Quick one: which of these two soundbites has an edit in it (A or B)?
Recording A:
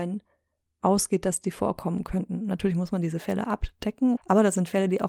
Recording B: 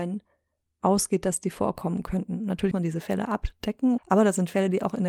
B